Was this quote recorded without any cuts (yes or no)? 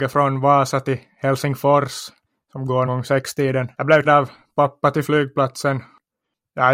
no